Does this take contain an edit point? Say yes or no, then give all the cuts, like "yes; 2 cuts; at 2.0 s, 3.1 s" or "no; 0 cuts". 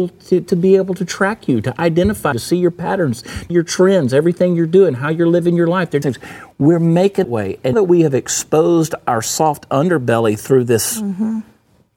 yes; 5 cuts; at 2.3 s, 3.5 s, 6.0 s, 7.2 s, 7.7 s